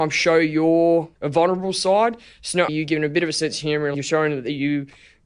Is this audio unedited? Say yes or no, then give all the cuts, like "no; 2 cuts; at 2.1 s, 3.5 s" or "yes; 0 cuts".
no; 3 cuts; at 1.1 s, 2.7 s, 3.9 s